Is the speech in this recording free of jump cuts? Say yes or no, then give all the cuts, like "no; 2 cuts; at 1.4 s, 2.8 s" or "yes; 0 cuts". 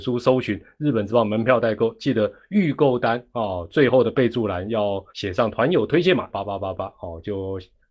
no; 2 cuts; at 5.1 s, 6.3 s